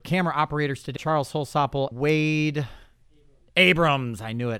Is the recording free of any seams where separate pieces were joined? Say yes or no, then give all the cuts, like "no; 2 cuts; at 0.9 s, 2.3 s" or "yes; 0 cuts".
no; 2 cuts; at 1.0 s, 1.9 s